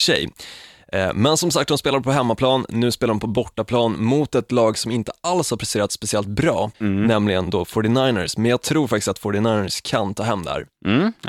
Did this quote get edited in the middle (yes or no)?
yes